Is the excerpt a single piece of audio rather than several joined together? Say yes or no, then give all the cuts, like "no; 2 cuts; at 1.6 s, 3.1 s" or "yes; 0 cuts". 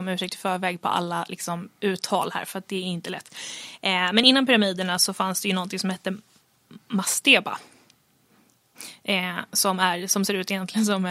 yes; 0 cuts